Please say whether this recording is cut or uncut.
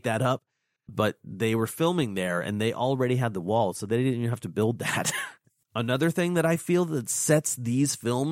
uncut